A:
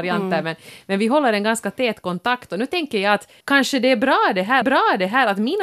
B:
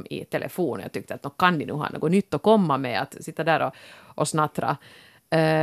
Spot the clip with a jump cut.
A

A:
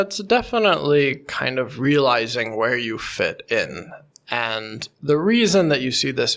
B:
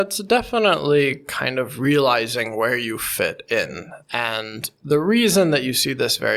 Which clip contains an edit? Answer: B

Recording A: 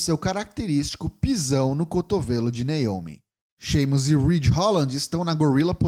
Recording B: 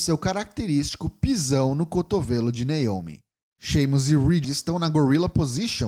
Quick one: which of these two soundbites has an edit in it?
B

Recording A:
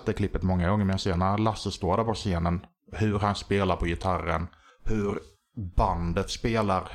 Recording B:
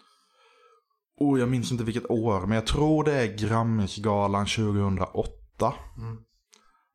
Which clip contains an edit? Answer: A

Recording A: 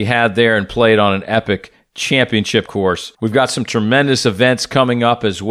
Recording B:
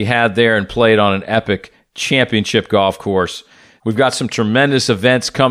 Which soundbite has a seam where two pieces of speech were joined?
A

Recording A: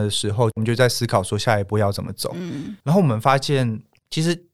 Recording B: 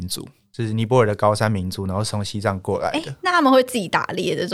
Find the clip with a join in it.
A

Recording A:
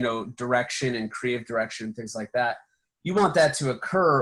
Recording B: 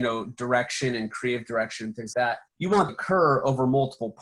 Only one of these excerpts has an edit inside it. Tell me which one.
B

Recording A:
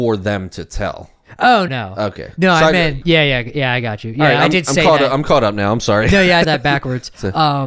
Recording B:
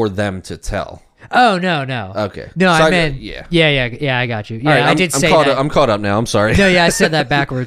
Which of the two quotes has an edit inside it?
A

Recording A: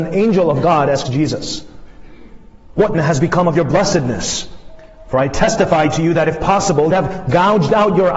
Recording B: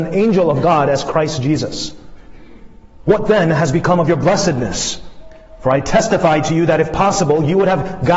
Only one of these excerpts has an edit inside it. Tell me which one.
A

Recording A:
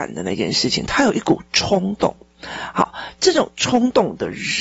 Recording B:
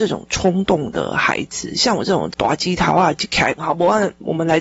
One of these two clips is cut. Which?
B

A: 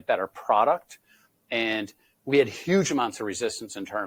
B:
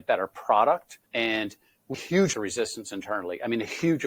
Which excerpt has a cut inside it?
B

